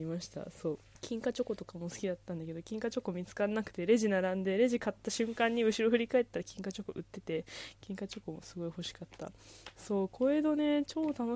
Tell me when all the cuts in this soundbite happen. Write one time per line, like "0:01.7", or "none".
0:00.9